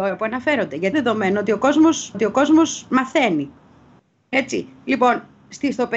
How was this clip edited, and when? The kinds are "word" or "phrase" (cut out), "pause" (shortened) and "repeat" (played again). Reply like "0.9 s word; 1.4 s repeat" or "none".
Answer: 0.9 s word; 2.1 s repeat